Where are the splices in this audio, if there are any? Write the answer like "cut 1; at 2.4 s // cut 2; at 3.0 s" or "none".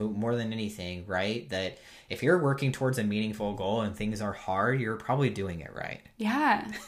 none